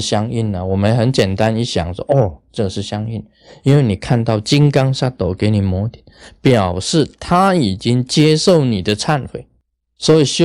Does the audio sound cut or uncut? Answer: uncut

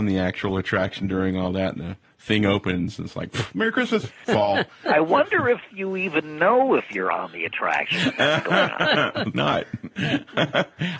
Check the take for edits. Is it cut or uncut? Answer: cut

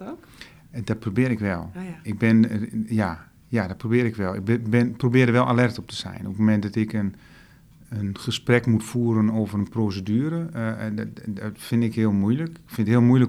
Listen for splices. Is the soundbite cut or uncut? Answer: uncut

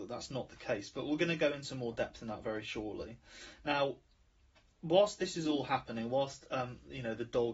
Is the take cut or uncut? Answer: uncut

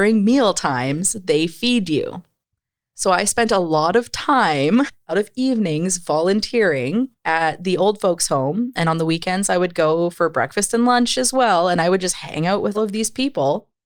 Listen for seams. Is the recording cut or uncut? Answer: cut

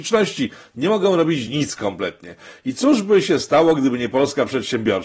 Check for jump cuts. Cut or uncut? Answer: uncut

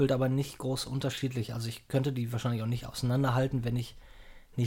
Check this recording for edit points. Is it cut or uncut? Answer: uncut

